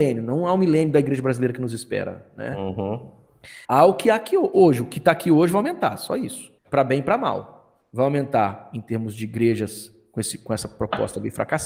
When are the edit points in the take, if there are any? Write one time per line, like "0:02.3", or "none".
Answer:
0:03.6
0:06.6